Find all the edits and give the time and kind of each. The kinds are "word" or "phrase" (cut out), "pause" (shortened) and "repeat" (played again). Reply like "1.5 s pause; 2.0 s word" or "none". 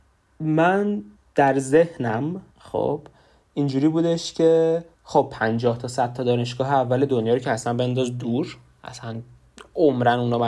1.2 s pause; 2.5 s pause; 4.9 s pause